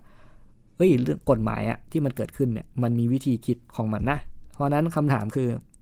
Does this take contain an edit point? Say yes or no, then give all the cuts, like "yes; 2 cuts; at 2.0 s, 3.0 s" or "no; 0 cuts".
yes; 2 cuts; at 2.7 s, 3.6 s